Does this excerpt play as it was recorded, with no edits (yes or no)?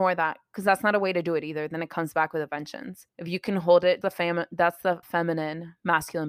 no